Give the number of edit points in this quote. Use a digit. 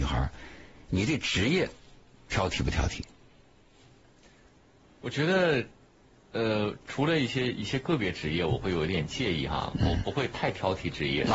0